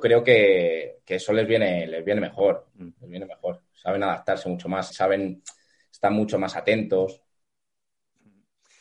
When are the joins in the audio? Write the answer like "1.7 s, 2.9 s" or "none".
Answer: 2.7 s, 4.9 s